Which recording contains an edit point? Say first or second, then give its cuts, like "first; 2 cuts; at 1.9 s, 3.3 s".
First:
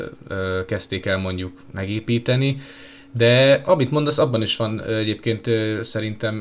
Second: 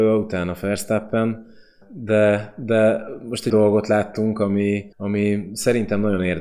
second; 3 cuts; at 1.8 s, 3.5 s, 4.9 s